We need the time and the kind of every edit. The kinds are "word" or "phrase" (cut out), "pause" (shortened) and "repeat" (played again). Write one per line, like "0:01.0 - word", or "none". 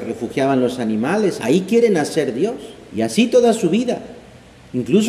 0:01.4 - word
0:02.9 - pause

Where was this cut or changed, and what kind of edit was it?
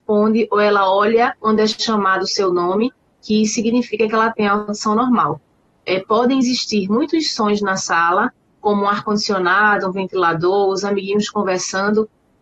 0:01.4 - pause

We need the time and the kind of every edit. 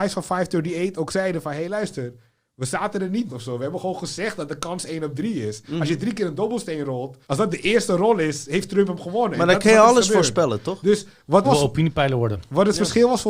0:03.3 - word
0:07.2 - pause
0:11.4 - phrase

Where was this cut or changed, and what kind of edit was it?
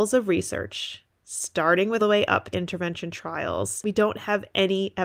0:02.0 - phrase
0:02.5 - phrase

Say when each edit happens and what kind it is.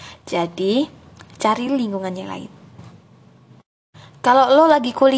none

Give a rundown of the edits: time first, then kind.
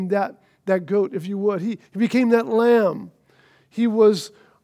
0:01.9 - pause

